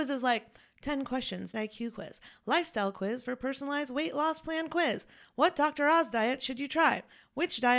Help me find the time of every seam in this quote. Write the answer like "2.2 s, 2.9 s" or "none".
1.5 s